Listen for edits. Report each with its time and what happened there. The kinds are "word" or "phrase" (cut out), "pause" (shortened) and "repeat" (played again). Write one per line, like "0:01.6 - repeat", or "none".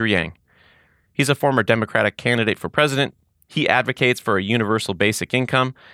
none